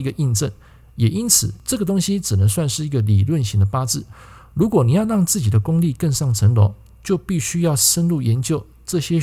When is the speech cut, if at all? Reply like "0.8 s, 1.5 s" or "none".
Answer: none